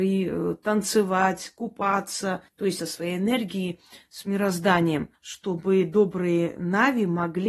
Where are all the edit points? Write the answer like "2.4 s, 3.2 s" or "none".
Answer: 2.5 s, 2.8 s, 5.1 s